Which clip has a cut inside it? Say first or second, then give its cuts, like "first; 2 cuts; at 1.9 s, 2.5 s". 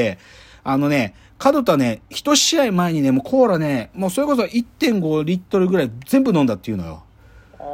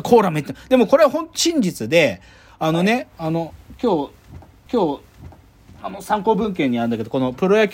second; 1 cut; at 4.7 s